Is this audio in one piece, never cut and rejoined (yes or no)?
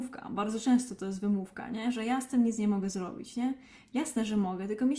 yes